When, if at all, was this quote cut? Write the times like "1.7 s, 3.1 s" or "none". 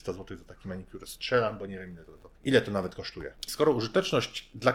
2.4 s, 3.5 s